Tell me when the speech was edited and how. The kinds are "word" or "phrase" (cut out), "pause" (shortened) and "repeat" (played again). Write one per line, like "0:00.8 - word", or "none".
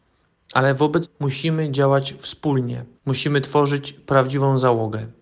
0:01.0 - word
0:02.9 - pause